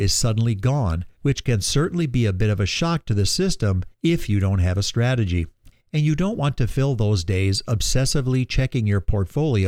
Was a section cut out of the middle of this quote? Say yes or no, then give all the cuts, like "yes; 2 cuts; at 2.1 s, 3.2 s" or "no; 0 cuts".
yes; 3 cuts; at 1.2 s, 3.9 s, 5.7 s